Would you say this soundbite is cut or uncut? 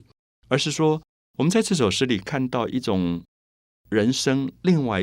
uncut